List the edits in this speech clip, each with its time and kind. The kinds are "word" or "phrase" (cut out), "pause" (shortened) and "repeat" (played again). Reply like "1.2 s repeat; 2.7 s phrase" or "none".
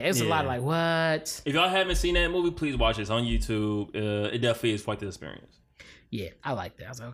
none